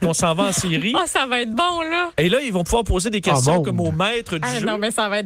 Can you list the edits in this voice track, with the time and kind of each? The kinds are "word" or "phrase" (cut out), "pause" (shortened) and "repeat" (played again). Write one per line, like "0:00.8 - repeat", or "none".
none